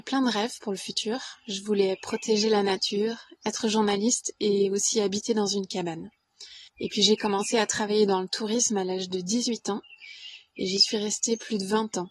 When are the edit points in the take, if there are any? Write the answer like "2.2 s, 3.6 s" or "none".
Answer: 6.7 s